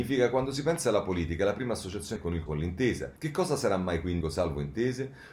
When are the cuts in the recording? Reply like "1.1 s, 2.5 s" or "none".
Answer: 2.2 s, 2.5 s, 3.2 s, 4.2 s